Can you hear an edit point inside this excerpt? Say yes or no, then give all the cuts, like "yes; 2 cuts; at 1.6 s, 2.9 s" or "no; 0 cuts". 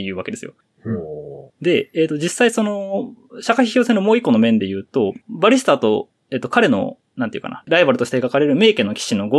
yes; 1 cut; at 1.5 s